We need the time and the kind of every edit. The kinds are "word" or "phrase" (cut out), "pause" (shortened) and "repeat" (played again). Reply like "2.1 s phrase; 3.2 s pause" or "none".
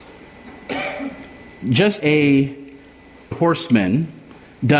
2.0 s word; 3.3 s word